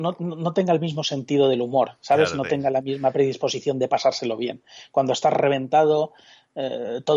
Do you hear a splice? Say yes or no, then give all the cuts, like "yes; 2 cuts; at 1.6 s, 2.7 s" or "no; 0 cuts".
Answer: no; 0 cuts